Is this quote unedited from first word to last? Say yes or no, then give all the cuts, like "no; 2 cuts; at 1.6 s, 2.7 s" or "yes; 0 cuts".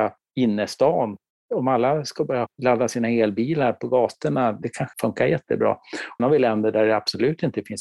no; 3 cuts; at 4.6 s, 4.9 s, 6.2 s